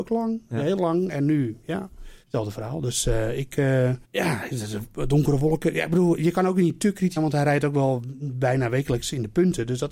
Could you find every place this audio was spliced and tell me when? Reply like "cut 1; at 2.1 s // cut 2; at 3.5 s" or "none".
cut 1; at 2.2 s // cut 2; at 4.0 s // cut 3; at 7.2 s